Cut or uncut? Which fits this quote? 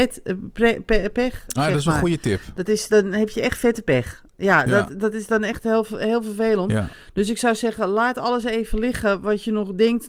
uncut